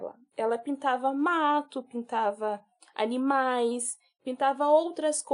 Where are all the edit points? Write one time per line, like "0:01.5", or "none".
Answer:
none